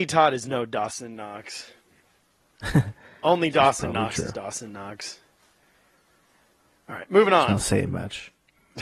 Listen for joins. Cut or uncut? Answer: uncut